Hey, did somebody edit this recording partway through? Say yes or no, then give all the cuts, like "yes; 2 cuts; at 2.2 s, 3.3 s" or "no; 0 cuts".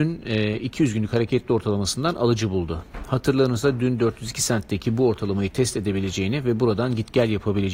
no; 0 cuts